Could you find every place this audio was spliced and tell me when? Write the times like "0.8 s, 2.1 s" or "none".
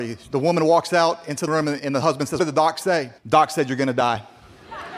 1.5 s, 1.8 s, 2.4 s, 3.2 s